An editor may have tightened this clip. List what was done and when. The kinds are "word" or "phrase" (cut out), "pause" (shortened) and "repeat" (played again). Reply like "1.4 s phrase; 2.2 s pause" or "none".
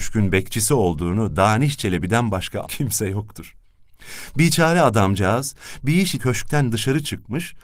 2.6 s word; 6.2 s word